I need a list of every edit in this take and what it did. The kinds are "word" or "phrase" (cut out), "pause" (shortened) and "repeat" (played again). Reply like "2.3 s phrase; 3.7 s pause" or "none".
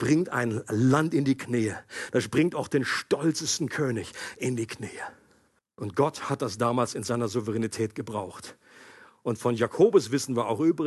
5.6 s pause